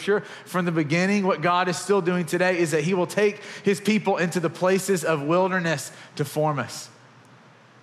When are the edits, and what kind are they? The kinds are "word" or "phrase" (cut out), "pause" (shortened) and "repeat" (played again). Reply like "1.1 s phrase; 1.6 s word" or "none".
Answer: none